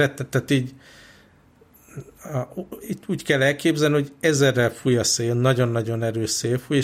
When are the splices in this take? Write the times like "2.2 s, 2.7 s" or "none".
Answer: none